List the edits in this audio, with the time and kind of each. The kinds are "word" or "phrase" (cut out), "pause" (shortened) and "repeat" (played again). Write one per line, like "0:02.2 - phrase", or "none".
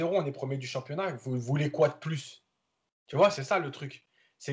none

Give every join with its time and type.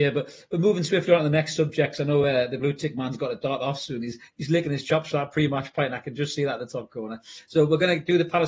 none

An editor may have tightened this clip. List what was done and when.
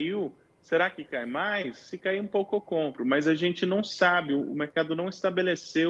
none

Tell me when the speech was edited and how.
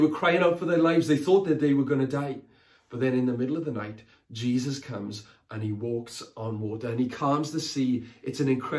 none

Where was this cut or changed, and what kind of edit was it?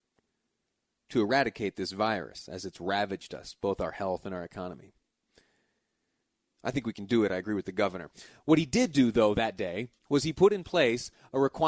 0:10.0 - pause

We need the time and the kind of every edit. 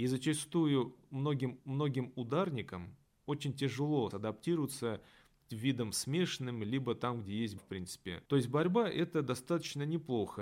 0:01.6 - repeat
0:04.1 - word
0:05.4 - word
0:07.6 - word
0:08.3 - pause

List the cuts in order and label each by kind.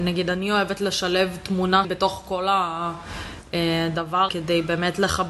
0:01.8 - word
0:04.3 - word

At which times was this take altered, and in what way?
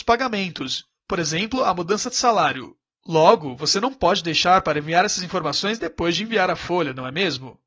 0:02.9 - pause

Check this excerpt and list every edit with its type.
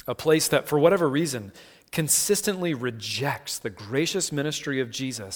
none

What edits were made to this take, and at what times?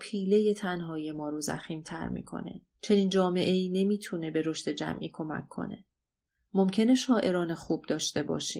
0:02.7 - pause

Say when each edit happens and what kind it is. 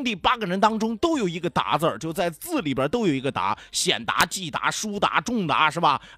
none

